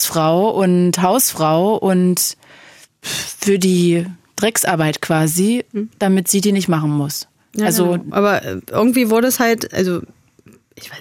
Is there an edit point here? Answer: no; 0 cuts

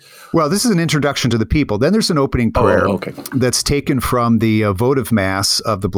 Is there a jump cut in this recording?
no; 0 cuts

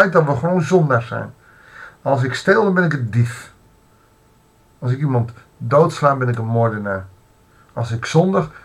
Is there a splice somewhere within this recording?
no; 0 cuts

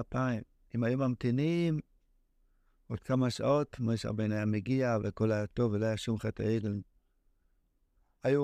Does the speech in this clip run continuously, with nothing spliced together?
yes; 0 cuts

